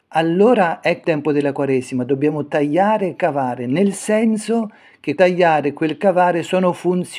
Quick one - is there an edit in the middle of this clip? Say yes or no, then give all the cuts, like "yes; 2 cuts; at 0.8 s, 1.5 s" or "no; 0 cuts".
yes; 2 cuts; at 1.0 s, 5.2 s